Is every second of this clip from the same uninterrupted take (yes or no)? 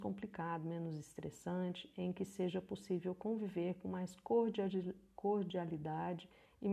yes